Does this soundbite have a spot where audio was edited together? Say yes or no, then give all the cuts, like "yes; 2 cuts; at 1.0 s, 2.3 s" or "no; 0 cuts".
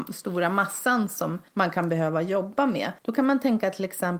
yes; 2 cuts; at 1.5 s, 3.0 s